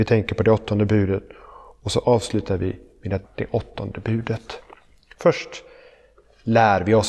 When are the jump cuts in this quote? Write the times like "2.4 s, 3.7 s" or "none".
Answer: 3.2 s